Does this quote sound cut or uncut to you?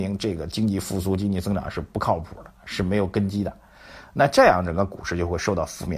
uncut